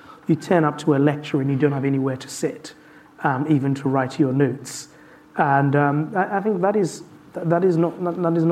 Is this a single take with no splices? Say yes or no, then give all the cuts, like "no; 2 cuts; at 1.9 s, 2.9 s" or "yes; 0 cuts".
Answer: yes; 0 cuts